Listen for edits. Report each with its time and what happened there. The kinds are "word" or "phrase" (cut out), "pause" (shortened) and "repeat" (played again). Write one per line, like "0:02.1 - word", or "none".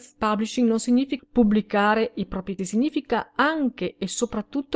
0:01.2 - word
0:02.6 - word